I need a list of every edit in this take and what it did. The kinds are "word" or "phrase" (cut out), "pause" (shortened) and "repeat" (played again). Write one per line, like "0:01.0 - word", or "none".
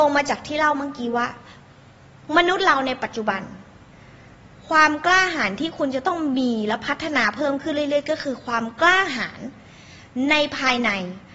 none